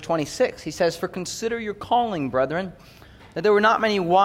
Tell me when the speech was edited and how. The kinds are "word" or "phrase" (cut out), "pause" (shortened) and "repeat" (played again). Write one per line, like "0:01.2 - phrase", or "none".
none